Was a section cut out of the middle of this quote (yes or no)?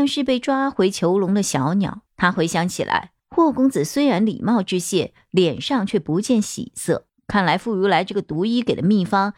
yes